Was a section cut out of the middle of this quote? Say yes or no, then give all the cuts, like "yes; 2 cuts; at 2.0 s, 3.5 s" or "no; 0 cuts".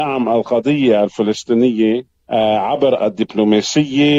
yes; 1 cut; at 3.0 s